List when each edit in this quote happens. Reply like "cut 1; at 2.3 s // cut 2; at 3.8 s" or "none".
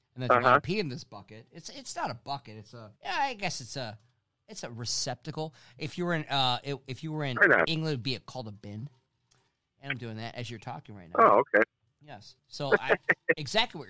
cut 1; at 3.0 s // cut 2; at 12.4 s